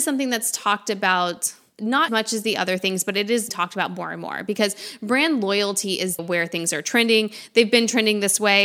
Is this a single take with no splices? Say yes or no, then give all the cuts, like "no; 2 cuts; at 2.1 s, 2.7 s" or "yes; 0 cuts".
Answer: no; 3 cuts; at 2.1 s, 3.5 s, 6.2 s